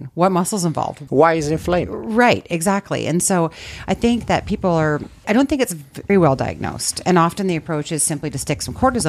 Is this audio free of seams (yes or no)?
no